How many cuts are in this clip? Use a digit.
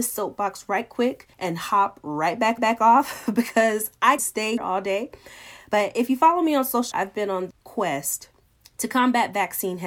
7